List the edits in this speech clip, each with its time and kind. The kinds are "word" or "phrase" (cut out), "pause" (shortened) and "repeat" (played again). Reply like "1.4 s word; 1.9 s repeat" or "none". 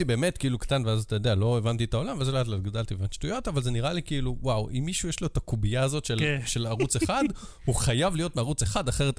3.2 s word